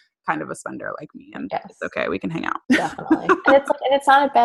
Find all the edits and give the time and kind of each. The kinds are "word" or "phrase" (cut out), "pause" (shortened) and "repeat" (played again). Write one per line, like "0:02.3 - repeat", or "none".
0:02.6 - pause